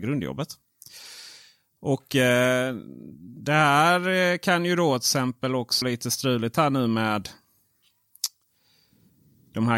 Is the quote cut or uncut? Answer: cut